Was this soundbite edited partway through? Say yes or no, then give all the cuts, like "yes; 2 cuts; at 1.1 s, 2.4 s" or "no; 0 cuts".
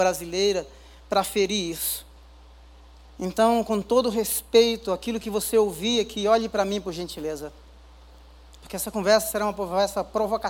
no; 0 cuts